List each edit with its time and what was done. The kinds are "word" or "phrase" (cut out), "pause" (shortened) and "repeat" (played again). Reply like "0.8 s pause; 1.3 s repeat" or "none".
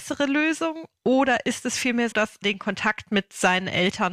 2.1 s word; 2.4 s phrase